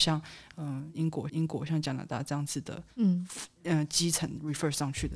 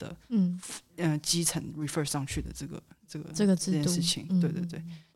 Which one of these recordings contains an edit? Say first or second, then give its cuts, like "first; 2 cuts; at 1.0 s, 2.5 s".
first; 1 cut; at 1.3 s